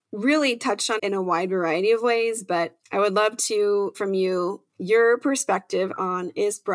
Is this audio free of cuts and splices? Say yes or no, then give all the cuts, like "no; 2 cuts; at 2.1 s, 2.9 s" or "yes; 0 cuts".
no; 4 cuts; at 1.0 s, 2.8 s, 3.9 s, 4.7 s